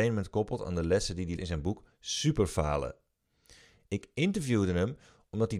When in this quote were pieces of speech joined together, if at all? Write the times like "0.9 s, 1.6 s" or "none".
1.4 s